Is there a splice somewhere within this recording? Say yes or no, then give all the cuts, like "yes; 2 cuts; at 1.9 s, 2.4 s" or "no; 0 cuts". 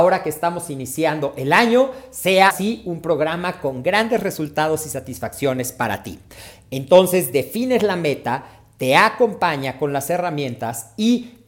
yes; 1 cut; at 2.5 s